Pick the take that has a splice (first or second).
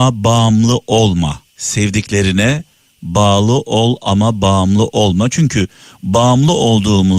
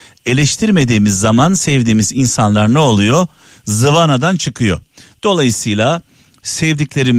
first